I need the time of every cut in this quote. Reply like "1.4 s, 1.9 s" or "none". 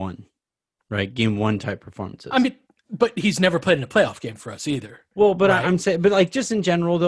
none